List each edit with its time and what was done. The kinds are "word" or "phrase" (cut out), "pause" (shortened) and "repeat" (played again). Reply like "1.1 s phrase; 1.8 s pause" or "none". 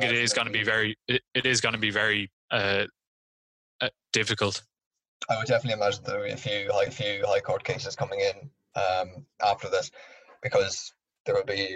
2.3 s pause; 6.9 s repeat